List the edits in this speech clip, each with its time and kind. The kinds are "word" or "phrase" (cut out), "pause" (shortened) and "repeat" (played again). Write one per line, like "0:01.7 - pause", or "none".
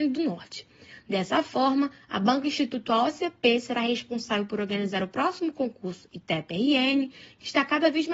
none